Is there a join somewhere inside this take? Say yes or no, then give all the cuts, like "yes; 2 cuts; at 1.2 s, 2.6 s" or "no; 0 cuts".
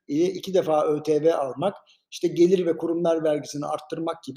no; 0 cuts